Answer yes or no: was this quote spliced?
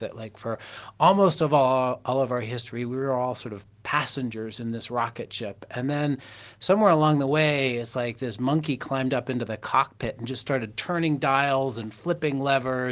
no